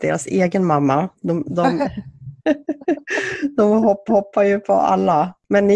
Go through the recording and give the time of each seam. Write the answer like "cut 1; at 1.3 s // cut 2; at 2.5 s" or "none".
cut 1; at 2.4 s // cut 2; at 4.1 s